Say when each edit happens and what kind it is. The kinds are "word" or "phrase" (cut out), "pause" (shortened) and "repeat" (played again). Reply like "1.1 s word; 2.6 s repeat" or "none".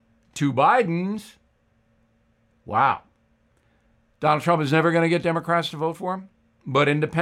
none